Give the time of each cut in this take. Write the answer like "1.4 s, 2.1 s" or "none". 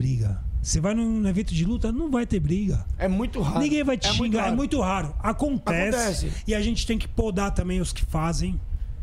none